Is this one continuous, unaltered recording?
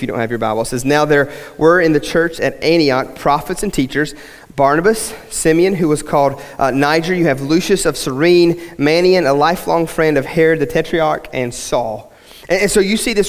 yes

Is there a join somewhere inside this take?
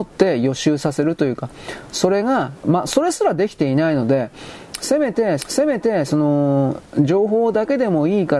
yes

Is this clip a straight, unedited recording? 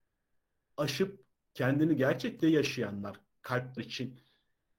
no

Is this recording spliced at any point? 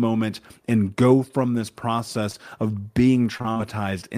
no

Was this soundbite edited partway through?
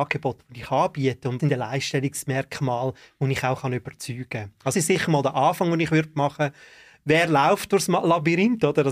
yes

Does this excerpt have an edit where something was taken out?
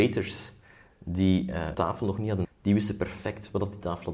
yes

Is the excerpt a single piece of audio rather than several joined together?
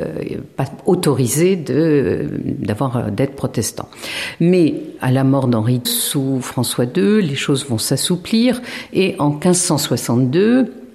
no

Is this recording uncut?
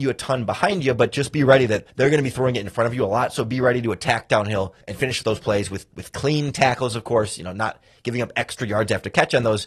no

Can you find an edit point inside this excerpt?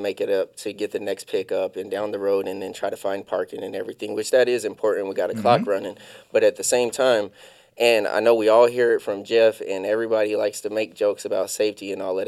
no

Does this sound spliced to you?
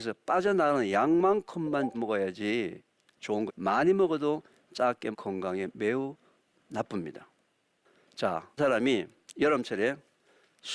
yes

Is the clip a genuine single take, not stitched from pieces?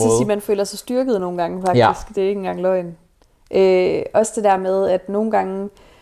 yes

